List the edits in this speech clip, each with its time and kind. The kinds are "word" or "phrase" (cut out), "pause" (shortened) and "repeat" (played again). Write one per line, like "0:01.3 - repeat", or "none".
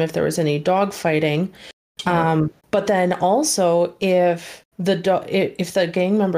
0:02.6 - pause
0:04.7 - pause